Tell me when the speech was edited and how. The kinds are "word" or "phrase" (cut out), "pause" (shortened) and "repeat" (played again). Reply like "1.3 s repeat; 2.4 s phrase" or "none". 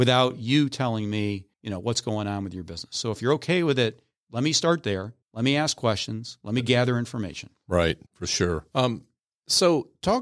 1.5 s pause; 5.2 s pause; 8.1 s pause; 8.7 s pause